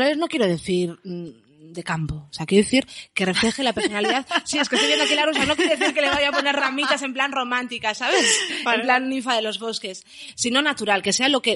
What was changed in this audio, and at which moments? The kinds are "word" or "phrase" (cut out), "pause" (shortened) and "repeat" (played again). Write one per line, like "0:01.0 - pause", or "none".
none